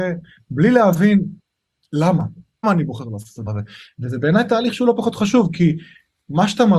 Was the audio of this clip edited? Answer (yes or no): yes